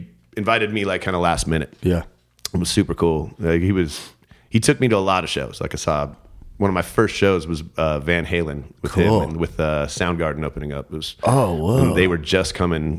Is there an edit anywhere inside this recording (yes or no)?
no